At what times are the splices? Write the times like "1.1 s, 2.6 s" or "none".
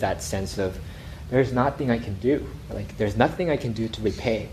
none